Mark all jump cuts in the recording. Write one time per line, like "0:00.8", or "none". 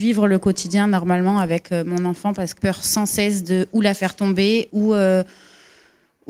0:02.6